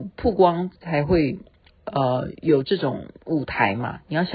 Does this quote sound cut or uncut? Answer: uncut